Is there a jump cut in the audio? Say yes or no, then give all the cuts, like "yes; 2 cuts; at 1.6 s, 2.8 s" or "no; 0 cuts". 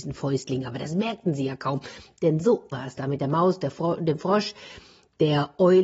yes; 1 cut; at 2.7 s